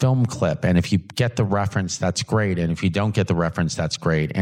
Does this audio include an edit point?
no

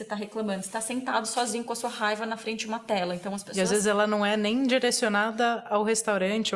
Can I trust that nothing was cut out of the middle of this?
yes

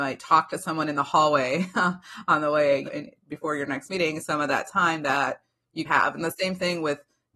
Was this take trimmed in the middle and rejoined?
yes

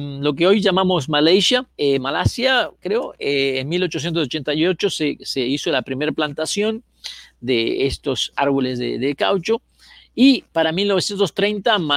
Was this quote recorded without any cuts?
no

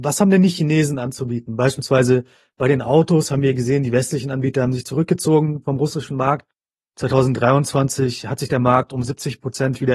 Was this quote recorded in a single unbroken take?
yes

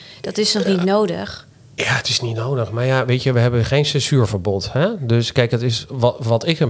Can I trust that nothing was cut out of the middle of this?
yes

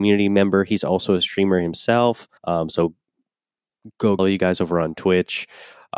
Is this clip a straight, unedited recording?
no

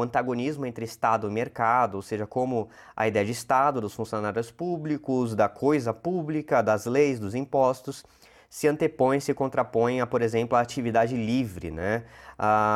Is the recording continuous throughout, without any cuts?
yes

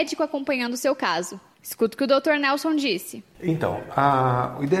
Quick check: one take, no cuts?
yes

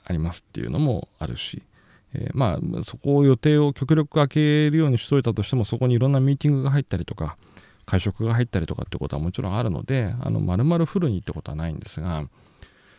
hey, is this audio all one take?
yes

